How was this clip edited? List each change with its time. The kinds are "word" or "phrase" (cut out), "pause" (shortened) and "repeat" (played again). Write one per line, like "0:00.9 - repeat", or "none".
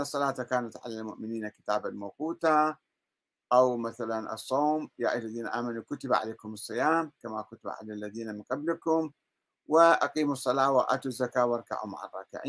none